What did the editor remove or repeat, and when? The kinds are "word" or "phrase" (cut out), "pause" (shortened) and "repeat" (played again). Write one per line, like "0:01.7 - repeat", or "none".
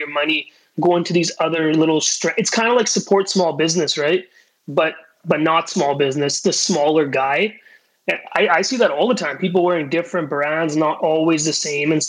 none